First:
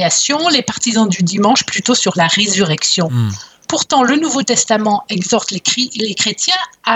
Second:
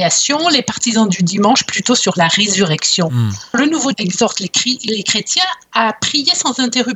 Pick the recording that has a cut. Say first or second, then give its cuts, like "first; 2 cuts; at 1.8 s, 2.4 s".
second; 2 cuts; at 3.5 s, 3.9 s